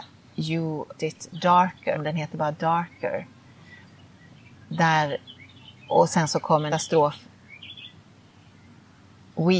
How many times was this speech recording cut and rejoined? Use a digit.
3